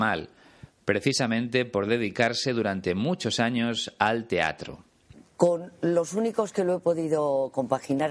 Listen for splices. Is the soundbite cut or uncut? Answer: uncut